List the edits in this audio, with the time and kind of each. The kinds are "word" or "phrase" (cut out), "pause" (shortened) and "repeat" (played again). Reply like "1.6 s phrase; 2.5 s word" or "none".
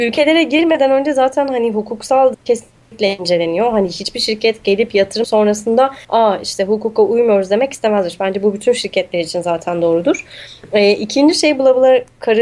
2.3 s word; 5.2 s word; 6.0 s pause